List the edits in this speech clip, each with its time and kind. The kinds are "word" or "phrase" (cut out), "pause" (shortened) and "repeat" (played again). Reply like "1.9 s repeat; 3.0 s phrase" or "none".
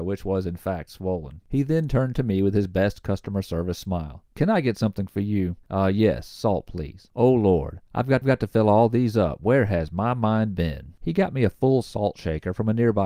5.6 s pause; 8.2 s repeat; 11.0 s pause